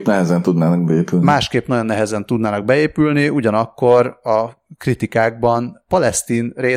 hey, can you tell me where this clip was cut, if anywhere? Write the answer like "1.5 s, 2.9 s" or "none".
none